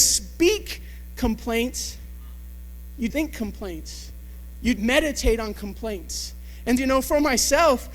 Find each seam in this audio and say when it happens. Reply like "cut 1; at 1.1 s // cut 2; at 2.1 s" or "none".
cut 1; at 3.1 s // cut 2; at 4.8 s // cut 3; at 6.8 s